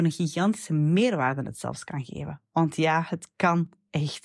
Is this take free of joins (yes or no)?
yes